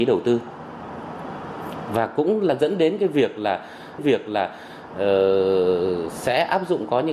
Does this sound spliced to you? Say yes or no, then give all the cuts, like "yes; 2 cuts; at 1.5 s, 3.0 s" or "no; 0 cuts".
yes; 1 cut; at 4.0 s